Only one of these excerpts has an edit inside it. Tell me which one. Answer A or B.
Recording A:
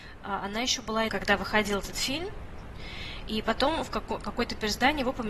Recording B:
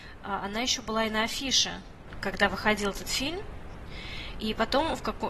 A